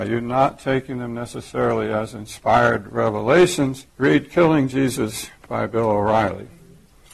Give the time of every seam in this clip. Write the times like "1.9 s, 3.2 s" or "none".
3.9 s